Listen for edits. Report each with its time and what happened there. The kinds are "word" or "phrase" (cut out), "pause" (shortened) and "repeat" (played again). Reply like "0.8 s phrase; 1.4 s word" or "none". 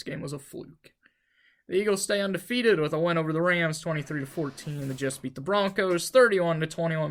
none